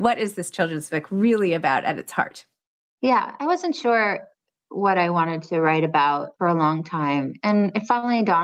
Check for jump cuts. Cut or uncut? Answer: uncut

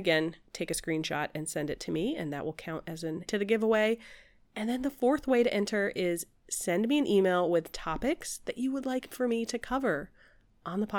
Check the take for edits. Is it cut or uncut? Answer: cut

